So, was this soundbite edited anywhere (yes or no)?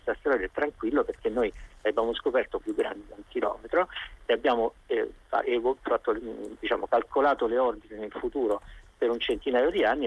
yes